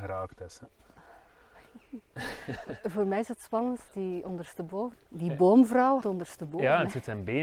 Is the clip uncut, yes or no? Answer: no